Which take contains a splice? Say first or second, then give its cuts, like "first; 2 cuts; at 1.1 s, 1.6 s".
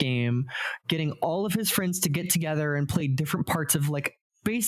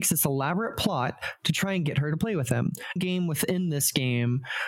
second; 1 cut; at 3.0 s